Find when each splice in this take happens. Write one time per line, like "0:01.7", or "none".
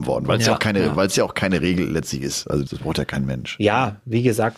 0:02.7